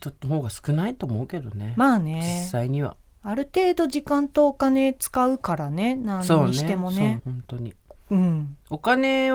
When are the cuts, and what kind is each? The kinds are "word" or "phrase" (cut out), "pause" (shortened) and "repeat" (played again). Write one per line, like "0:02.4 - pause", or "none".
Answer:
0:07.2 - word